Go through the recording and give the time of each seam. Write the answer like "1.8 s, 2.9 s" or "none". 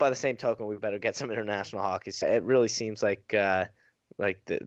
2.2 s